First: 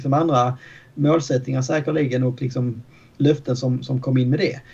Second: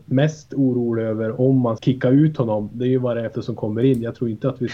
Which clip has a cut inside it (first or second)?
second